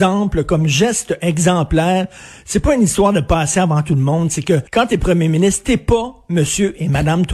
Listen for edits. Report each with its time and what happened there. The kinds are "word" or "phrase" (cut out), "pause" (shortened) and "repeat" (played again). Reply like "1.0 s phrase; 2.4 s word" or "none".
4.7 s pause

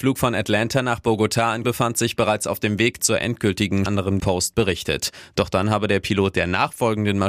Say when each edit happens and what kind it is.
1.6 s word; 3.9 s phrase; 4.2 s phrase

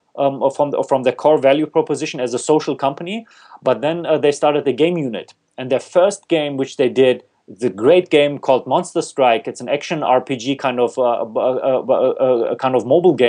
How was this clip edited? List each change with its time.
none

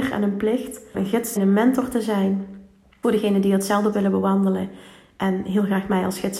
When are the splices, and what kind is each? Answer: 0.9 s word; 1.4 s word; 3.0 s word; 3.9 s word

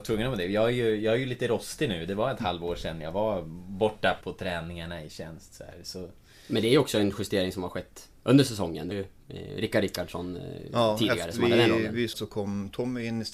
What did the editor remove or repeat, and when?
4.2 s word; 8.9 s word; 12.1 s word

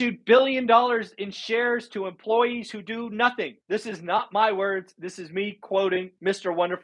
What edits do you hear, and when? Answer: 3.6 s pause

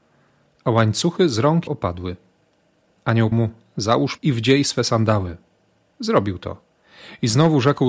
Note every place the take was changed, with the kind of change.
1.7 s word; 3.3 s word; 4.2 s word

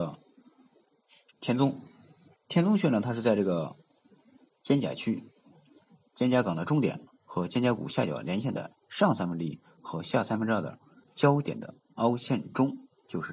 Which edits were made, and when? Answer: 2.4 s pause; 11.0 s pause

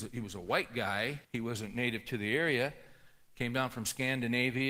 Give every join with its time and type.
1.2 s pause

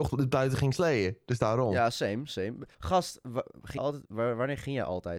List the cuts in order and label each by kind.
2.7 s pause; 3.8 s word

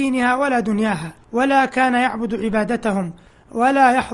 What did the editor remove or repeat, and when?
1.2 s pause

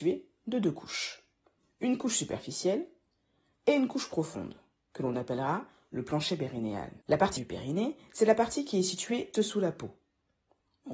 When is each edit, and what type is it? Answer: 7.0 s pause; 7.4 s word; 8.0 s pause; 9.3 s word

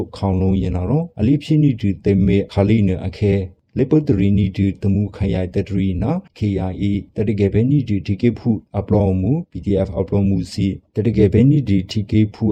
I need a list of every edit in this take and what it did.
6.3 s pause; 7.1 s pause; 10.9 s pause

